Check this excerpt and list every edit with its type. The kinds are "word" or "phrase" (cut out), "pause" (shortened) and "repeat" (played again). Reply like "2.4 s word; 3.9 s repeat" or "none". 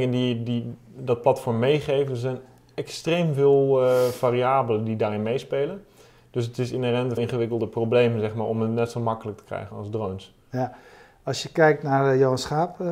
7.2 s word; 9.7 s word